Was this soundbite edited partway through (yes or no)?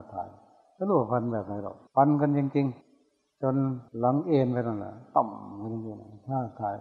yes